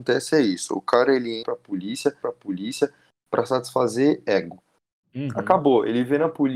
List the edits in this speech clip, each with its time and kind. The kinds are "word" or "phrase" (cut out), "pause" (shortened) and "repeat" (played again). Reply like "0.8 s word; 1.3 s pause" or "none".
1.4 s word; 2.2 s repeat